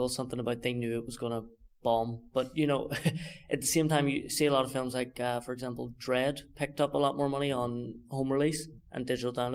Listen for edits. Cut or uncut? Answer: uncut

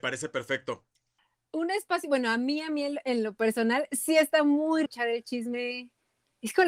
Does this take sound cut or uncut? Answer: cut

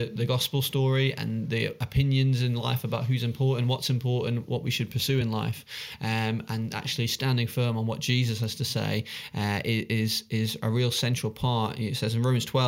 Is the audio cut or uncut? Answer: uncut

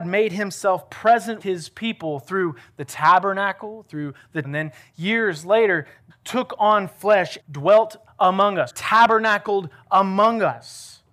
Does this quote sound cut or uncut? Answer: cut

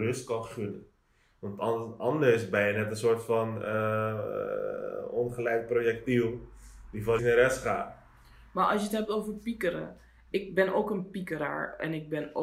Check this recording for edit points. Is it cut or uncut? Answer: cut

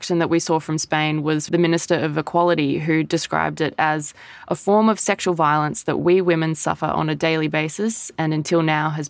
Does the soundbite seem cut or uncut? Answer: cut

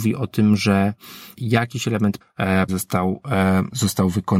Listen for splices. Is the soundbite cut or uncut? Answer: cut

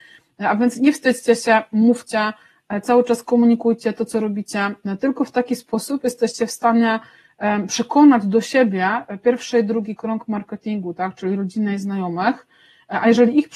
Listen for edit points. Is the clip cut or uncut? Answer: uncut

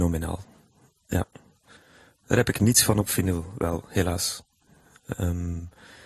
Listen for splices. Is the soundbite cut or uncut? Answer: uncut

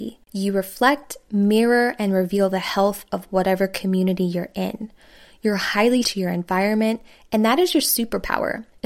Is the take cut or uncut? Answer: cut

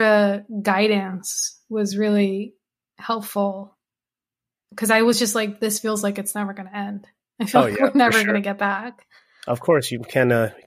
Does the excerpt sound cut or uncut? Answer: uncut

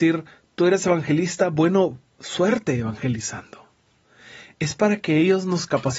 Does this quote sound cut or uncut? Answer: uncut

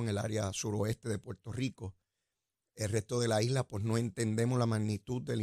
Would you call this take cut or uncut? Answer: uncut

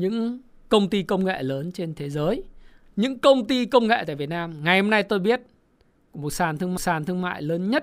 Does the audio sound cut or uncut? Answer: cut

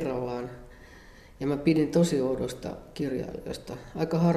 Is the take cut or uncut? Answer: uncut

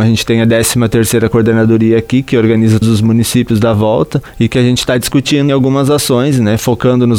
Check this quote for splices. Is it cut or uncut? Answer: cut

